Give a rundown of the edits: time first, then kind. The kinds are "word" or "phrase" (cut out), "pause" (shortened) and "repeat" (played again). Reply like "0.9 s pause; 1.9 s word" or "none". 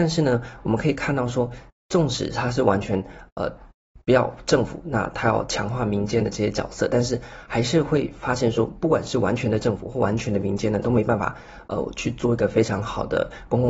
4.0 s pause